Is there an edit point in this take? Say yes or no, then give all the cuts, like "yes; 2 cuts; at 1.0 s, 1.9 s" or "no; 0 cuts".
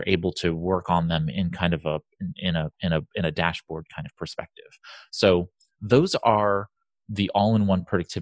no; 0 cuts